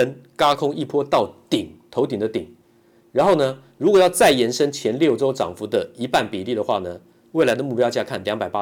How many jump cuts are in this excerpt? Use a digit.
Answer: 0